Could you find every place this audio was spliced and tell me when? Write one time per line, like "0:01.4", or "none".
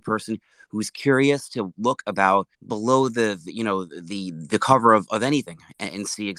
0:02.5